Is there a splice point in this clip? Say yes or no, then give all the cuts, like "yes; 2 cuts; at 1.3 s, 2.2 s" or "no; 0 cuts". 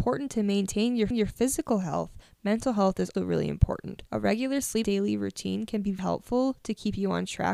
yes; 5 cuts; at 1.1 s, 3.1 s, 4.1 s, 4.8 s, 6.0 s